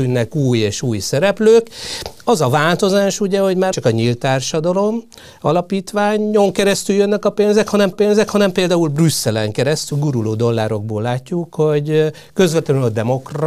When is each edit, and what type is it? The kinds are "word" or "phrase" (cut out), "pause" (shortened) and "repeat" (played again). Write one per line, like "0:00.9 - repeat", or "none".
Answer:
0:03.7 - word
0:07.9 - repeat
0:09.9 - phrase